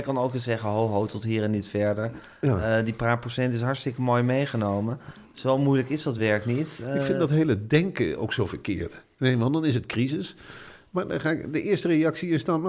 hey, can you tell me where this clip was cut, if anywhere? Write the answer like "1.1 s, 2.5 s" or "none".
none